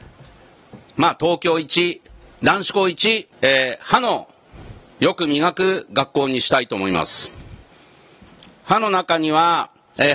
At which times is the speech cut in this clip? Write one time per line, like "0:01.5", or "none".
0:03.3
0:04.9